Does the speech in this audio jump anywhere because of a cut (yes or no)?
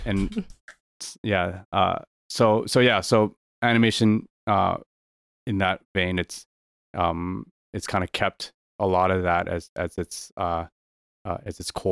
no